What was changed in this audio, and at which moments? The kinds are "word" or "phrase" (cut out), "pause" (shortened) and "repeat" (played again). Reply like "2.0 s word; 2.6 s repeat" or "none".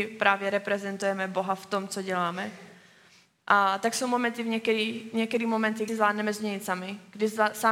5.9 s phrase